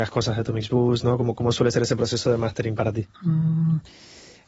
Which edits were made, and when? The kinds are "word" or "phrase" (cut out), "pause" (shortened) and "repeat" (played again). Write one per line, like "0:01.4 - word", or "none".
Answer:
0:03.1 - pause